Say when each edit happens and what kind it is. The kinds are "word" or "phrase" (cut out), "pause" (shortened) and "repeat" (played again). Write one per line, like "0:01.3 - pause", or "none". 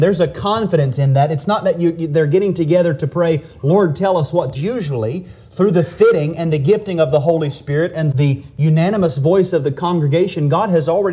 0:04.5 - phrase
0:08.1 - word